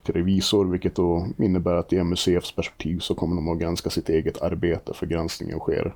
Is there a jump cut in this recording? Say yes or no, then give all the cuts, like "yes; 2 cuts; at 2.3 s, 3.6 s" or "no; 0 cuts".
no; 0 cuts